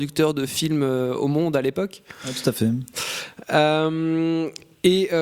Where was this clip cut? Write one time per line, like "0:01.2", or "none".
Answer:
none